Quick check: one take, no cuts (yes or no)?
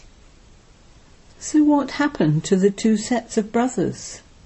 yes